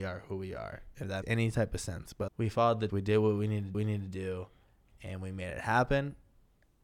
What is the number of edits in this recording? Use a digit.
4